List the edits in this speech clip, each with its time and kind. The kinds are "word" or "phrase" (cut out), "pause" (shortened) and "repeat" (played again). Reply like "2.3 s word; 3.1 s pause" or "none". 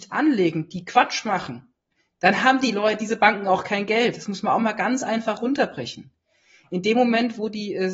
none